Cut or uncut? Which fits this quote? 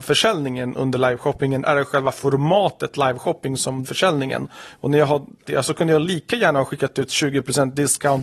cut